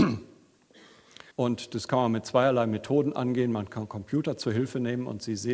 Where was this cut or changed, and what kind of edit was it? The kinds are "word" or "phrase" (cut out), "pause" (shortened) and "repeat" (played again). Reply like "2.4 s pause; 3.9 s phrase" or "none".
1.3 s pause

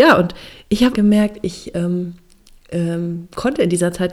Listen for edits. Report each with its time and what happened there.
0.9 s word

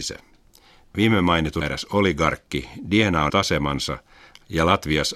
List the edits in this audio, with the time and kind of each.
1.6 s word; 3.3 s word

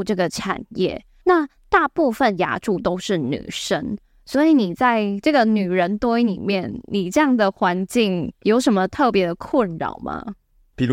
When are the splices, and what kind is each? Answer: none

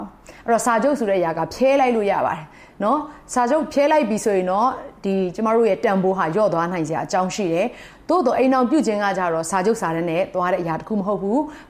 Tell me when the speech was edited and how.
none

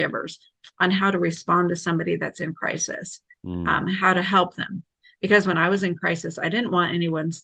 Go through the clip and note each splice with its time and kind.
none

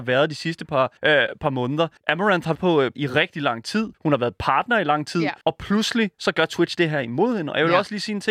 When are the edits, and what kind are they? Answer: 1.0 s pause; 2.0 s pause; 2.6 s word; 2.9 s phrase; 3.9 s pause; 5.4 s pause

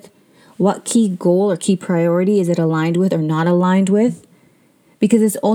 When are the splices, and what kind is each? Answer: none

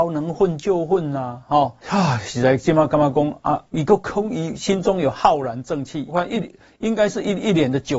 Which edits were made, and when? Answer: 1.8 s pause; 3.7 s pause; 6.1 s phrase

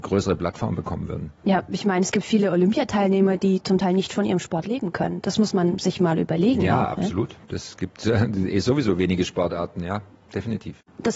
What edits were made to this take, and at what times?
7.4 s pause

